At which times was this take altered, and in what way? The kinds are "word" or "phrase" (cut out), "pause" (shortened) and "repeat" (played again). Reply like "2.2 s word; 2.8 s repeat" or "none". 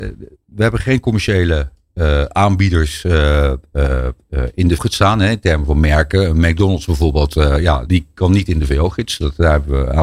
4.8 s word; 7.9 s word